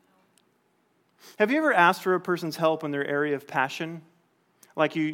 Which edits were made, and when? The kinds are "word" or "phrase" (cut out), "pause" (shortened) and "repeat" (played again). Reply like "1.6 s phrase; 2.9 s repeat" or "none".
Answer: none

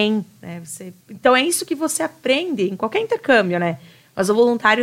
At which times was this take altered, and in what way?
1.0 s pause

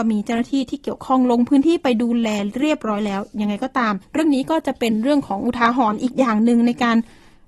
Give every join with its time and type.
4.0 s pause

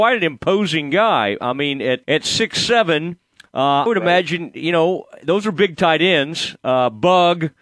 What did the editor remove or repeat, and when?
2.0 s word; 3.9 s word

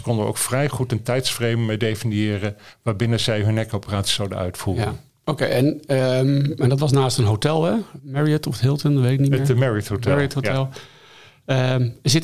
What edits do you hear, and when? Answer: none

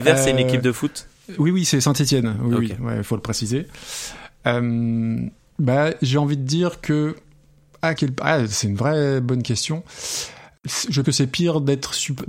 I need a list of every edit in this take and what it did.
1.3 s word; 8.0 s word; 11.0 s word

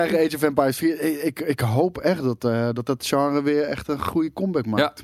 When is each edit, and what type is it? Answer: none

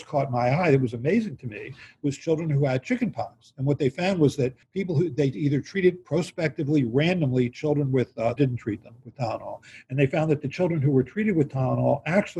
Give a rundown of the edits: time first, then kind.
4.6 s pause; 8.4 s phrase

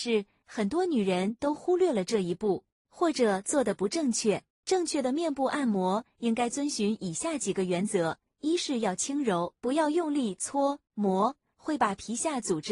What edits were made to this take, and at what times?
9.6 s pause

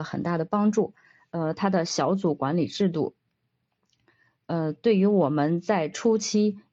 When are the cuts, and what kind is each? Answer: none

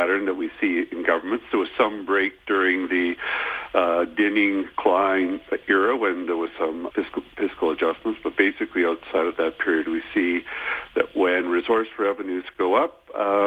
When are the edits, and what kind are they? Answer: 6.9 s word

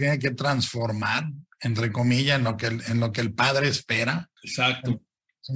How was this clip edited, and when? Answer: 4.4 s pause

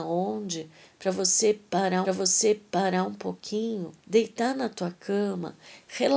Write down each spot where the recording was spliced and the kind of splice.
2.0 s repeat; 4.0 s pause

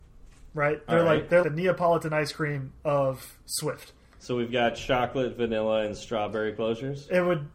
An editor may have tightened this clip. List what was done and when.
1.4 s word

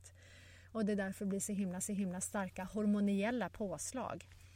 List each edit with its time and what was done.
1.8 s repeat

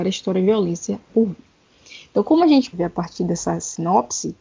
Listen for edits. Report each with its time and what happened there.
1.1 s word; 2.7 s word

